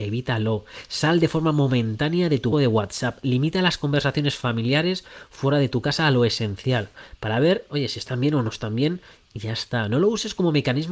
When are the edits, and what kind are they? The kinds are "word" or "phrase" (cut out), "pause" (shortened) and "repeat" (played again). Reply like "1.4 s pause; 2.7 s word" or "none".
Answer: 2.5 s word